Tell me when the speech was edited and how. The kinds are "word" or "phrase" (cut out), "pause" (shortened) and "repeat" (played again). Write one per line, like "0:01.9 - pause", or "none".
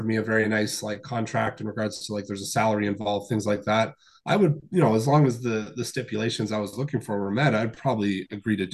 none